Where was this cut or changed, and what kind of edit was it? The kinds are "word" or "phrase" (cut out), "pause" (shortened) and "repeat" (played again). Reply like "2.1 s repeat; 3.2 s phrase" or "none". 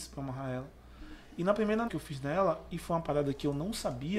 1.9 s word